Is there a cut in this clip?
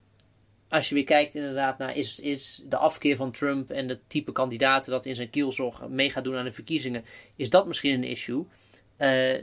no; 0 cuts

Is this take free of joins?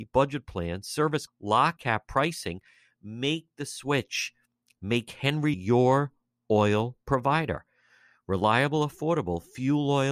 no; 3 cuts; at 1.3 s, 1.8 s, 5.5 s

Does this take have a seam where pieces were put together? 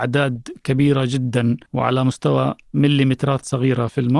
yes; 1 cut; at 1.7 s

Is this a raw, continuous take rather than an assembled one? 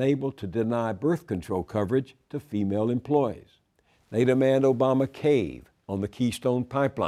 yes; 0 cuts

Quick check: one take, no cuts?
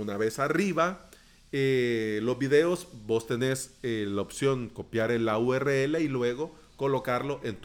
yes; 0 cuts

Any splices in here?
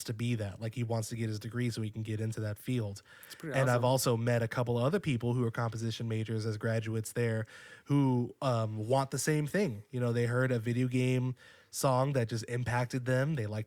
no; 0 cuts

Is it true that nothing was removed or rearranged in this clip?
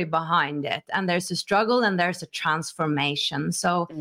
yes; 0 cuts

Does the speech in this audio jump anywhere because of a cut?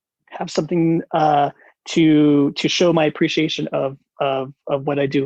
no; 0 cuts

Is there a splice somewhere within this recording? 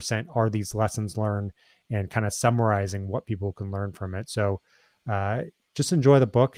no; 0 cuts

